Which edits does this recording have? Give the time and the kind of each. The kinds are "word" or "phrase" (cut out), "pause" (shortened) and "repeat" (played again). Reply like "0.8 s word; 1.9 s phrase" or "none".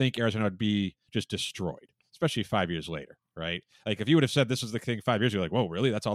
none